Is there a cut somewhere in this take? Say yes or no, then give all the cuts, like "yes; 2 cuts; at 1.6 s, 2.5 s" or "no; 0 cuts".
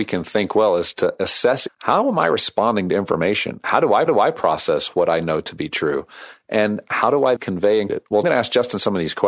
yes; 5 cuts; at 1.7 s, 4.1 s, 7.4 s, 7.9 s, 8.2 s